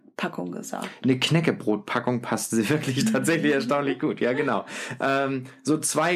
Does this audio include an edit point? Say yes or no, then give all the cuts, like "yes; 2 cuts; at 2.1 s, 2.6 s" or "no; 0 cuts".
no; 0 cuts